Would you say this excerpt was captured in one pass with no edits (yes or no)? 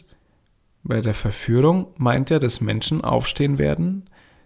yes